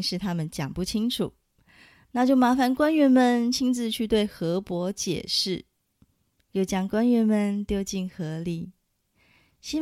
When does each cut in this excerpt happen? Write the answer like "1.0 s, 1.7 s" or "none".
none